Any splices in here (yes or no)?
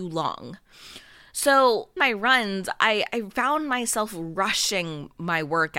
yes